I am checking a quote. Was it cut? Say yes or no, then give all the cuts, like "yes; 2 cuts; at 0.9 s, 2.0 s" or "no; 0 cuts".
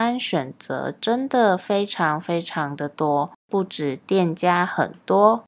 yes; 1 cut; at 3.4 s